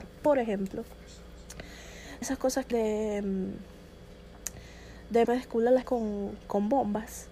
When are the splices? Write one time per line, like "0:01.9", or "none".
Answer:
0:02.2
0:02.7
0:05.2
0:05.8
0:06.4